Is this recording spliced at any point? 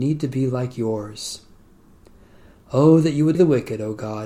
yes; 1 cut; at 3.3 s

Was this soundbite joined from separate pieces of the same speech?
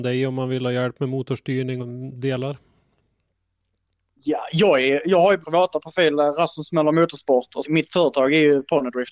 yes; 3 cuts; at 1.8 s, 5.4 s, 7.6 s

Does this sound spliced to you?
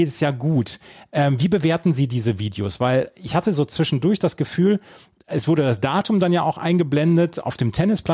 no; 0 cuts

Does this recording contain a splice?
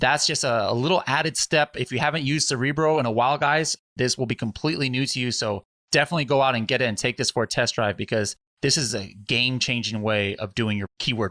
no; 0 cuts

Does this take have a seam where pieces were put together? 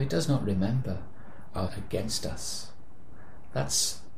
yes; 1 cut; at 1.7 s

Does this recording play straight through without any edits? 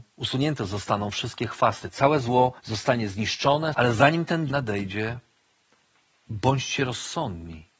no; 3 cuts; at 2.6 s, 3.7 s, 4.5 s

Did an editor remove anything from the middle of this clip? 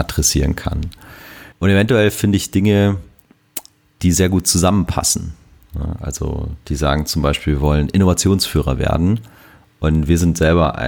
yes; 1 cut; at 1.5 s

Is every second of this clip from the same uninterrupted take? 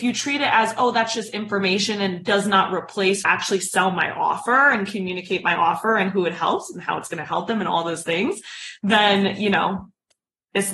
no; 1 cut; at 3.2 s

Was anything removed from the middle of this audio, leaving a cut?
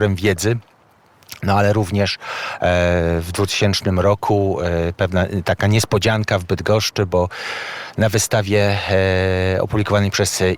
no; 0 cuts

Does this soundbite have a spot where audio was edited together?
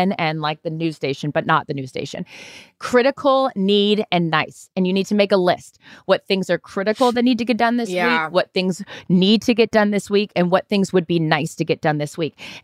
no; 0 cuts

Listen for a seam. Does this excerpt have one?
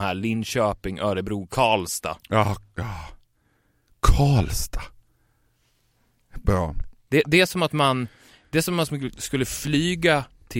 no; 0 cuts

